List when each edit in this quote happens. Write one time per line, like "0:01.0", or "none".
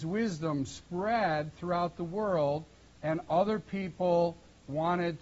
none